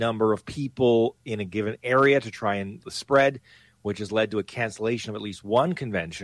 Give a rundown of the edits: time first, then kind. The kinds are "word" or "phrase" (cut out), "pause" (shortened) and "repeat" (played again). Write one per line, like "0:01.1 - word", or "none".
0:02.8 - word

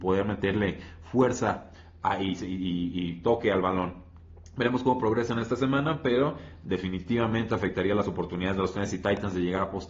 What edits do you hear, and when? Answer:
none

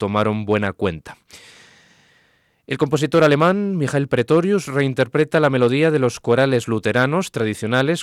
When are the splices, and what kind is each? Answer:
none

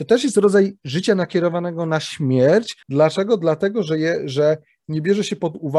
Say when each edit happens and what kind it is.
0:02.8 - pause

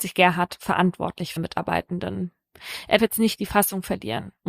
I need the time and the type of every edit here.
0:01.4 - word
0:03.0 - word

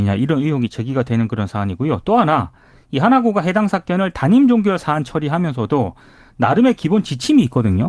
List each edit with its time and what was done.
none

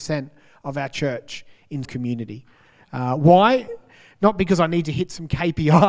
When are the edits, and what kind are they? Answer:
0:01.8 - word

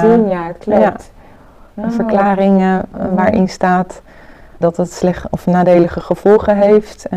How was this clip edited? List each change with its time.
0:04.6 - word

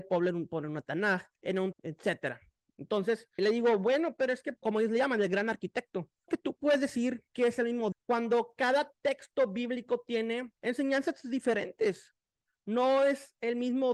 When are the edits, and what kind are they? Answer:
0:01.4 - pause
0:01.7 - phrase
0:03.4 - word
0:04.6 - word
0:06.3 - phrase
0:07.3 - pause
0:07.9 - word
0:10.6 - pause

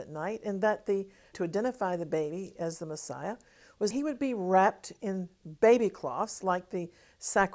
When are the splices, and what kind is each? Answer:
0:01.3 - word
0:03.9 - word

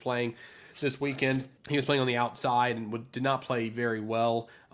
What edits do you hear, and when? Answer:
0:01.6 - pause

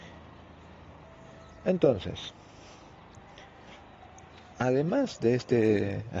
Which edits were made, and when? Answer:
none

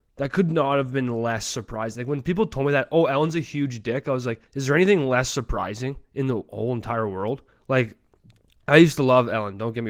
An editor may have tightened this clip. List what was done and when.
0:04.4 - pause
0:07.5 - pause

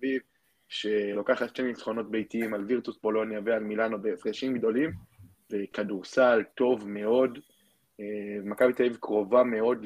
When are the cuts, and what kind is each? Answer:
none

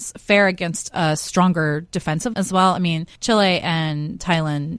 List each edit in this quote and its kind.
0:02.3 - word
0:03.2 - pause

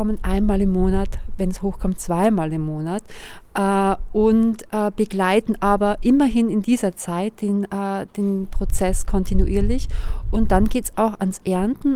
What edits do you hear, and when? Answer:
none

